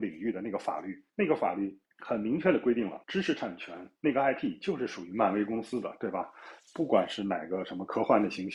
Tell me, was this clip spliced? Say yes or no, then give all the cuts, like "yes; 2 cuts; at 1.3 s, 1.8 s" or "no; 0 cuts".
yes; 4 cuts; at 1.1 s, 1.9 s, 3.0 s, 4.0 s